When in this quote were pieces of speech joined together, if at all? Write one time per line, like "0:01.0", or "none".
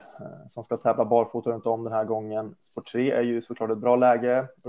0:02.6